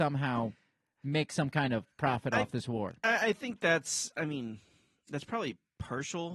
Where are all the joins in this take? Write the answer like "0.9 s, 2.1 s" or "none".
none